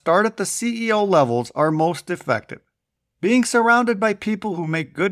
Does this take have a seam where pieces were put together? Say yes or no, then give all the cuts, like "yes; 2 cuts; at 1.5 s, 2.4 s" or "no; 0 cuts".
no; 0 cuts